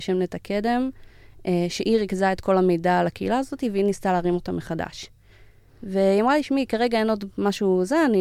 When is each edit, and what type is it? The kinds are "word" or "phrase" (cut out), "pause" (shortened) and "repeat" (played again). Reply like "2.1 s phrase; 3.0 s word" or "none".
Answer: none